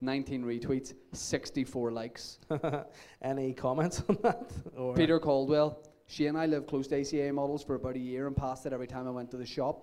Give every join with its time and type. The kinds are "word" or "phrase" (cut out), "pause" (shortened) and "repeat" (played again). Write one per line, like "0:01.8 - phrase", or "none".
none